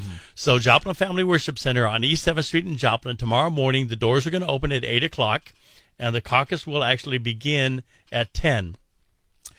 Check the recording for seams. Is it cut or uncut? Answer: uncut